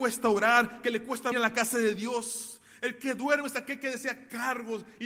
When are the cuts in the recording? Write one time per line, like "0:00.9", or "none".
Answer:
0:01.3